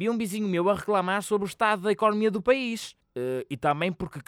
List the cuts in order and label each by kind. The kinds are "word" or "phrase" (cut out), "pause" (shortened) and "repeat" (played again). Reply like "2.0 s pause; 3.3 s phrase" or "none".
3.0 s pause